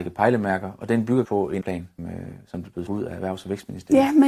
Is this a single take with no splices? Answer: no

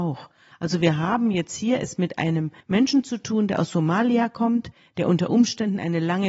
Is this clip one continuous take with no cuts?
no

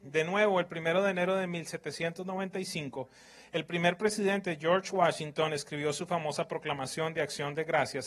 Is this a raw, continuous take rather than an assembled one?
yes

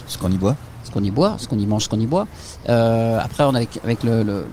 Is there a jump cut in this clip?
no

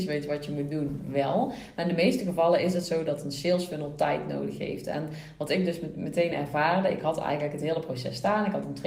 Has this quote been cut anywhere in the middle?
no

